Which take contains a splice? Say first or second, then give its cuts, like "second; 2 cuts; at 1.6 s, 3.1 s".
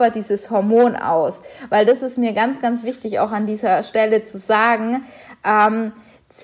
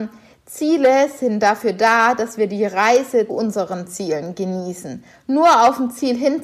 second; 1 cut; at 3.3 s